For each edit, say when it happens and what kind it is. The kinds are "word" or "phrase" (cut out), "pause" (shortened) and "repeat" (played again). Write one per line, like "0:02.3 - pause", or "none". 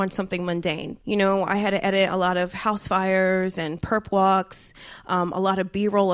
0:01.0 - pause